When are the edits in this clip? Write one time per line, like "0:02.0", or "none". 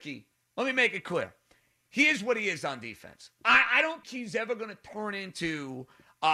0:04.0